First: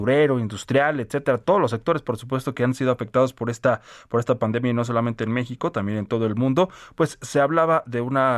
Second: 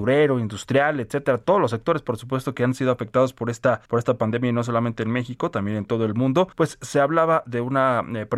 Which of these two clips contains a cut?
second; 2 cuts; at 3.9 s, 6.5 s

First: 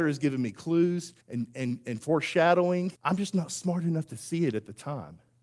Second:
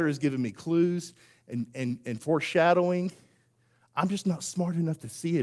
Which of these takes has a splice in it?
first; 2 cuts; at 1.2 s, 3.0 s

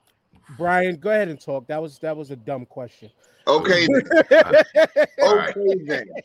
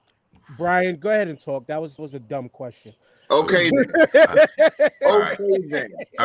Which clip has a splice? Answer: second; 1 cut; at 2.0 s

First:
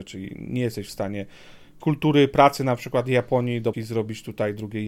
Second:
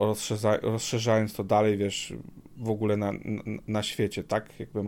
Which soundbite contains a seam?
first; 2 cuts; at 1.8 s, 3.7 s

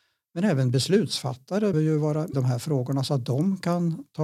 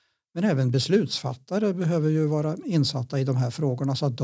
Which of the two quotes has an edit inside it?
first; 2 cuts; at 1.7 s, 2.3 s

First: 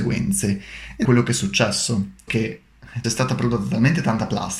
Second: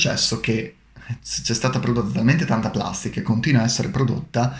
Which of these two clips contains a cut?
first; 3 cuts; at 1.0 s, 2.3 s, 3.0 s

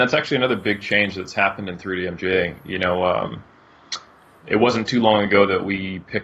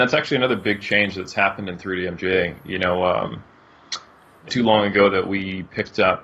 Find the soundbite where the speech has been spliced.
second; 1 cut; at 4.5 s

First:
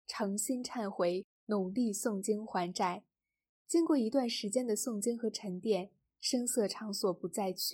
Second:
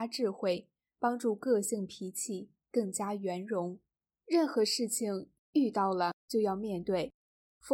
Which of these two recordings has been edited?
second; 1 cut; at 4.1 s

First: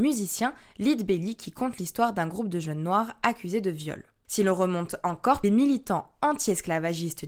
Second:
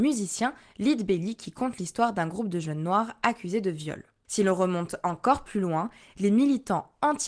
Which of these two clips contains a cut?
first; 1 cut; at 5.4 s

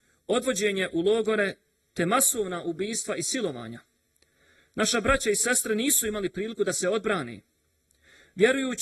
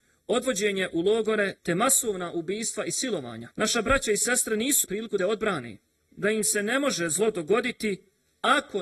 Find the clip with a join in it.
second; 5 cuts; at 1.6 s, 3.5 s, 4.8 s, 5.2 s, 6.1 s

